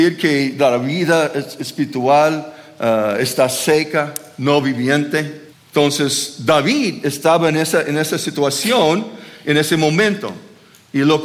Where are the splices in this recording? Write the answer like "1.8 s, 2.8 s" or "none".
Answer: 5.5 s